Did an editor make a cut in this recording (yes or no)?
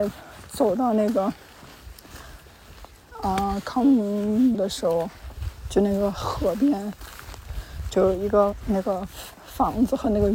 yes